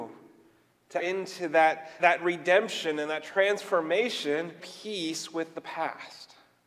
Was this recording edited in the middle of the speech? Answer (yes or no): yes